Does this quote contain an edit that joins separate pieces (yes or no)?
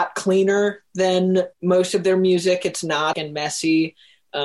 yes